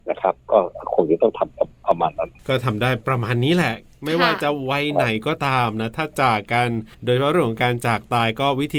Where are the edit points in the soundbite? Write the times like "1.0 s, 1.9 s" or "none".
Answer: 6.9 s